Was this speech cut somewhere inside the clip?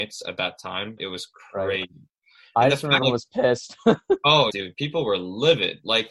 yes; 3 cuts; at 1.0 s, 3.0 s, 4.5 s

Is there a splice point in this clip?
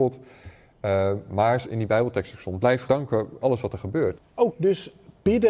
yes; 4 cuts; at 1.6 s, 2.9 s, 3.4 s, 4.5 s

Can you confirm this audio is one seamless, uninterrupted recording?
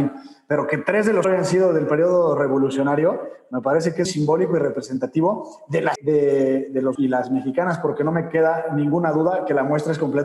no; 4 cuts; at 1.2 s, 4.1 s, 6.0 s, 7.0 s

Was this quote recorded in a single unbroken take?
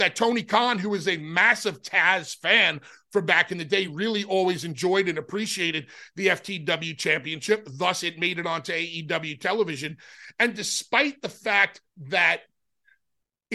yes; 0 cuts

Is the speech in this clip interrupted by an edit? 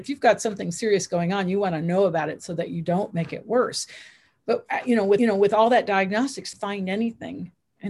yes; 2 cuts; at 5.2 s, 6.5 s

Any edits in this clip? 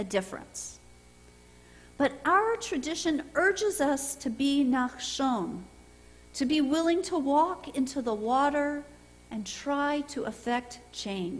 no; 0 cuts

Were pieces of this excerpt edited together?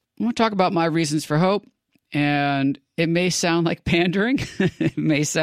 no; 0 cuts

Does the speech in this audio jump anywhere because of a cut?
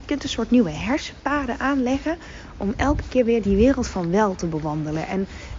yes; 1 cut; at 3.4 s

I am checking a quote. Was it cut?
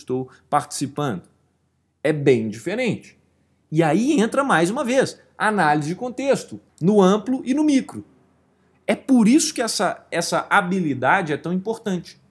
no; 0 cuts

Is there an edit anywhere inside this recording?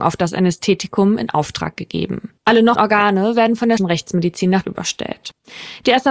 yes; 4 cuts; at 2.4 s, 2.8 s, 3.8 s, 4.6 s

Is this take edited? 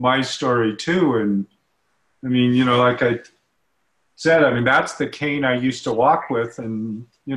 no; 0 cuts

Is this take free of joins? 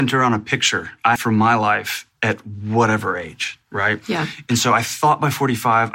no; 1 cut; at 1.2 s

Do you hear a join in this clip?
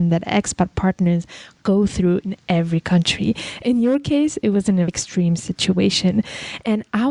yes; 1 cut; at 4.9 s

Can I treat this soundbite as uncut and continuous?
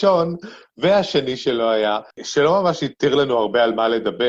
no; 1 cut; at 2.1 s

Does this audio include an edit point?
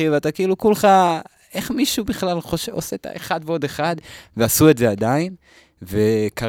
no; 0 cuts

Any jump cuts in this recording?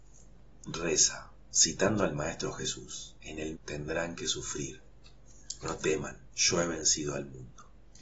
yes; 4 cuts; at 3.2 s, 3.5 s, 5.6 s, 6.2 s

